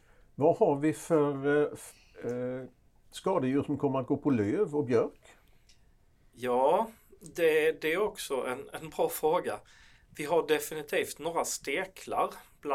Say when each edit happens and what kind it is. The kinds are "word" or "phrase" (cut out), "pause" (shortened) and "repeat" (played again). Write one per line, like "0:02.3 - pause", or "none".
none